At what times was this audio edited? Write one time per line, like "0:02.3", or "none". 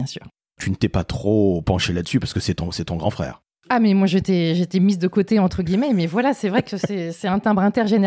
none